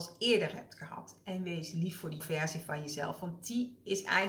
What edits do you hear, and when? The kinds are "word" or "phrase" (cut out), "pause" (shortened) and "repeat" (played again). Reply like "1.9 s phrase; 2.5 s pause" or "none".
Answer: 2.2 s word